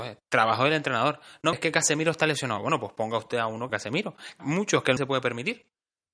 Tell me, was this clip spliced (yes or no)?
yes